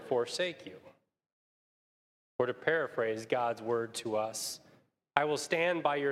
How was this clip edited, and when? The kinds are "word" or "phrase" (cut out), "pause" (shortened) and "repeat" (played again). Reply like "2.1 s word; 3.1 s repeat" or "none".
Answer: none